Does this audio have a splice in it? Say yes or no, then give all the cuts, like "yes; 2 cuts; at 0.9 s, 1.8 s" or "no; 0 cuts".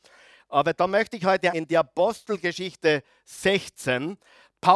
yes; 1 cut; at 1.5 s